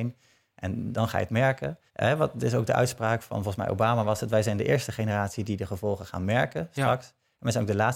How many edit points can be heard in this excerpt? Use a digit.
1